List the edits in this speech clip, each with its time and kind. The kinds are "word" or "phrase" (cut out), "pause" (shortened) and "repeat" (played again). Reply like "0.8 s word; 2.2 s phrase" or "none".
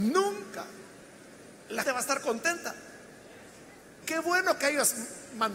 1.8 s word; 4.0 s word

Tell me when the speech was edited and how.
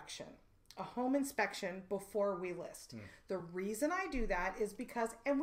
none

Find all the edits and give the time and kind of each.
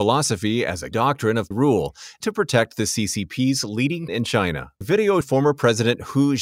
0.9 s word; 1.5 s word; 2.2 s word; 4.1 s word; 4.8 s word; 5.2 s word

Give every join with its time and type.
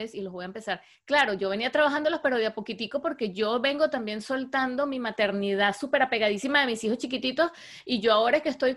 0.9 s pause

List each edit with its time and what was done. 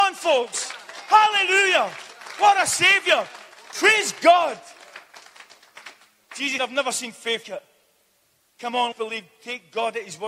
6.6 s word; 7.4 s word; 8.9 s word

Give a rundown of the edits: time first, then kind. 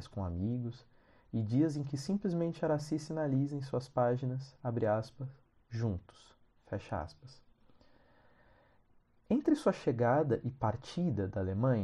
none

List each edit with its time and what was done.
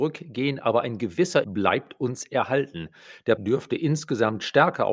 1.4 s word; 3.4 s word

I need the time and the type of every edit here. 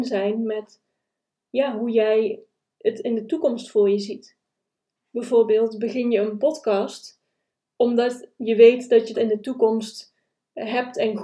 9.1 s word

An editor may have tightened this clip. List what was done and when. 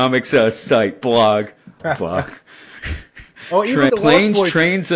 1.8 s word; 3.9 s word

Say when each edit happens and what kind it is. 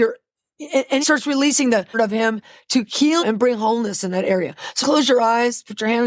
1.0 s word; 1.9 s word; 3.2 s word; 4.8 s word

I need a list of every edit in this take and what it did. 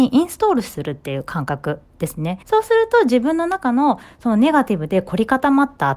2.4 s pause

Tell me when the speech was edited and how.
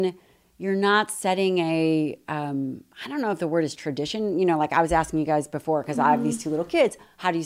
2.9 s pause

